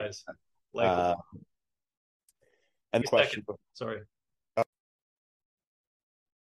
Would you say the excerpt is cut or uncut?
cut